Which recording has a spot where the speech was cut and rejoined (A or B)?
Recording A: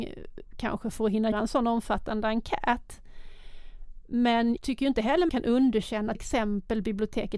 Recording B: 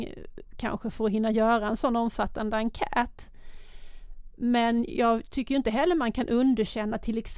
A